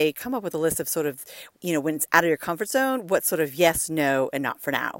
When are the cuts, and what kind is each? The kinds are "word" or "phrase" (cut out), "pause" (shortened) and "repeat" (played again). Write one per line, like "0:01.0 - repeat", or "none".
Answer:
0:01.5 - pause